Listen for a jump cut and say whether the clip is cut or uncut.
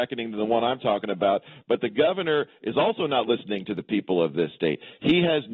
uncut